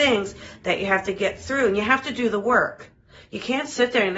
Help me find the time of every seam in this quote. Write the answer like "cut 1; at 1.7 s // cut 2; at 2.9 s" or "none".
none

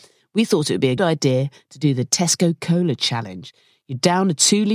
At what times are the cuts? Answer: cut 1; at 1.0 s

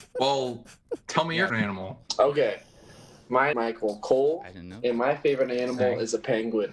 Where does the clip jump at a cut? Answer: cut 1; at 1.5 s // cut 2; at 3.5 s

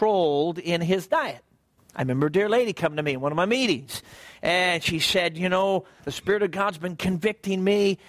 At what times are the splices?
cut 1; at 1.8 s // cut 2; at 6.0 s

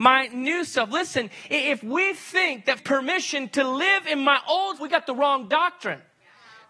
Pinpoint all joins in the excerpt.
cut 1; at 2.8 s // cut 2; at 4.8 s

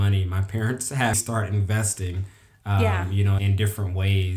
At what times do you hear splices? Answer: cut 1; at 1.1 s // cut 2; at 3.4 s

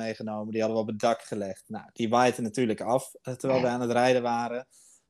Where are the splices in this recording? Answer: none

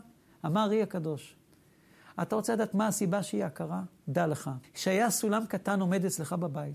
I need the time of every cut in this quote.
cut 1; at 4.0 s // cut 2; at 4.6 s

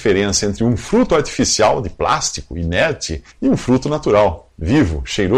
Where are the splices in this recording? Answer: cut 1; at 3.3 s

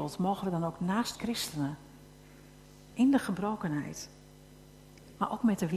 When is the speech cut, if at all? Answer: cut 1; at 1.1 s

